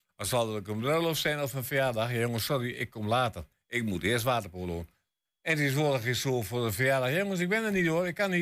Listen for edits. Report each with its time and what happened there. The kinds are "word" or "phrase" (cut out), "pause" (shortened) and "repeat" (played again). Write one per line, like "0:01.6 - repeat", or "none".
none